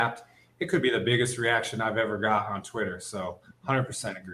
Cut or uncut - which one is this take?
uncut